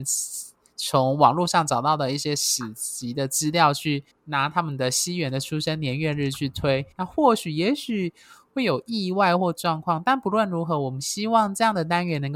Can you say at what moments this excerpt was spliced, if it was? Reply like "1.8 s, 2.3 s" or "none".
4.1 s, 6.9 s